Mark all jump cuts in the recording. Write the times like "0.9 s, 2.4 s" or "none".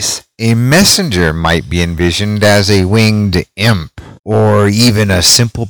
4.2 s

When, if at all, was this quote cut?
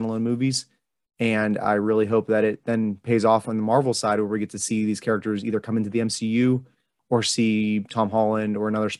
none

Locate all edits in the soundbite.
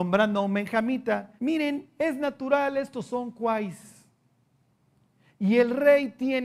1.4 s

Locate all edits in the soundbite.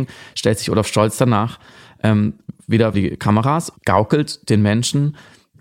2.9 s, 3.8 s

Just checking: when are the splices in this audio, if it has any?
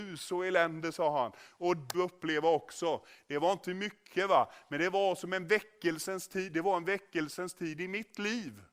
1.9 s

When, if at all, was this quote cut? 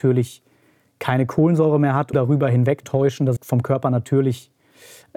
2.1 s, 2.8 s, 3.4 s

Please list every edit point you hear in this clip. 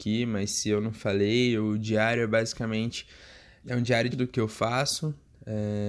3.6 s, 4.1 s

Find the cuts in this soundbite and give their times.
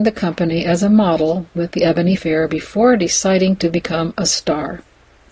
2.2 s

